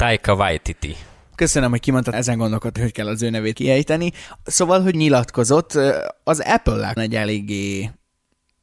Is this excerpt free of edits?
no; 5 cuts; at 2.1 s, 2.8 s, 3.5 s, 4.9 s, 7.0 s

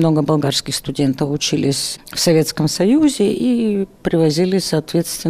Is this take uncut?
yes; 0 cuts

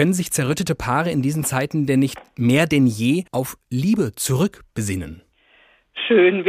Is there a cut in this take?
yes; 1 cut; at 3.3 s

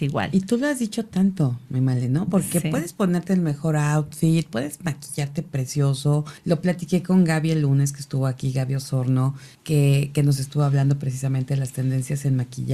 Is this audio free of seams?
no; 2 cuts; at 6.4 s, 9.5 s

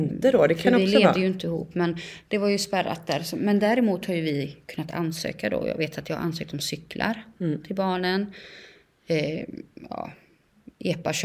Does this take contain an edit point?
no; 0 cuts

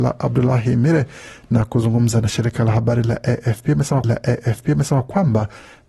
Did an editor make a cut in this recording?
yes; 1 cut; at 4.0 s

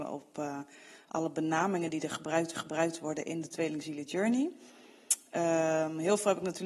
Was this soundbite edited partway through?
yes; 1 cut; at 2.5 s

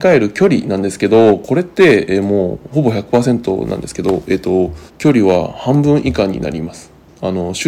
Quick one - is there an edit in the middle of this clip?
yes; 1 cut; at 4.9 s

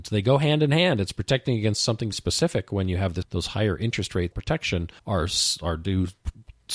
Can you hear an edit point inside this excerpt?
yes; 4 cuts; at 2.1 s, 3.2 s, 4.3 s, 5.0 s

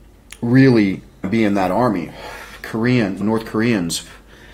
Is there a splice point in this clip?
yes; 2 cuts; at 1.2 s, 3.2 s

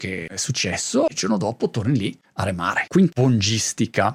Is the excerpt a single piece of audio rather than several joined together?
no; 1 cut; at 3.1 s

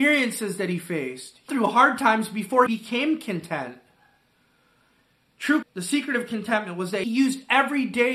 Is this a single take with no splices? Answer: no; 4 cuts; at 1.5 s, 2.7 s, 5.6 s, 7.0 s

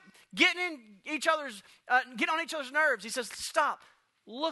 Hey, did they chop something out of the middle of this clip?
no; 0 cuts

